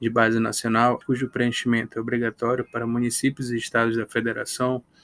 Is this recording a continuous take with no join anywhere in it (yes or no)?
no